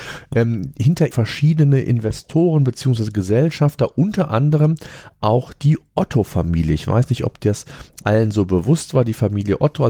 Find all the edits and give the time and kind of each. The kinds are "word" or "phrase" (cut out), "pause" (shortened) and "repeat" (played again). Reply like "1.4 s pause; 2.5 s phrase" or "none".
1.1 s phrase